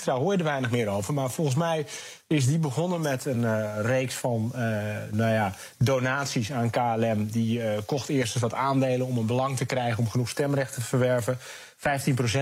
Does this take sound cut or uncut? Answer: uncut